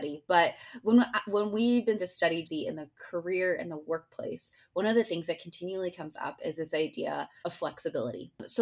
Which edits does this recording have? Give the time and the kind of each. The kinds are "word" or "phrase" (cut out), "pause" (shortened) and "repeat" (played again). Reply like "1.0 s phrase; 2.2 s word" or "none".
2.0 s word; 2.4 s word; 7.4 s word